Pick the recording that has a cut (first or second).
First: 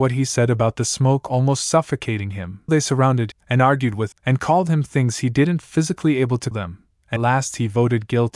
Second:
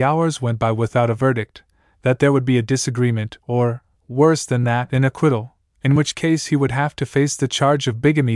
first